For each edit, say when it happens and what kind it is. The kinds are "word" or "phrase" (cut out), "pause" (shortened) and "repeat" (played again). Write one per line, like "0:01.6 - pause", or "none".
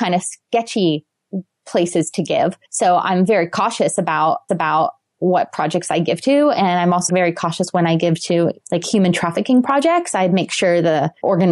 0:02.7 - pause
0:04.5 - repeat
0:07.1 - word
0:08.6 - pause